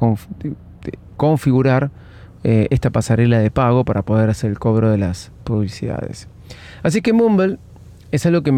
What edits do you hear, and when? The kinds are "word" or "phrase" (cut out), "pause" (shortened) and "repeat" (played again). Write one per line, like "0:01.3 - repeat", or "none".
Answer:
0:01.1 - pause

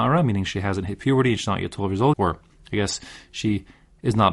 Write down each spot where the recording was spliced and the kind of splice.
0:02.1 - word

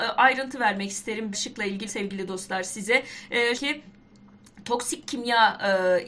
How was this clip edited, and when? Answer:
0:01.3 - word
0:01.9 - word
0:03.5 - word

